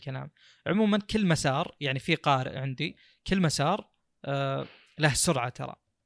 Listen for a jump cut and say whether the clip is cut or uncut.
uncut